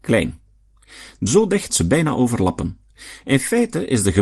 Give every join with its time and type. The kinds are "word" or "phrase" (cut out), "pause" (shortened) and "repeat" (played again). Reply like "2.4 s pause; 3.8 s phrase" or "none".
1.3 s phrase; 1.7 s phrase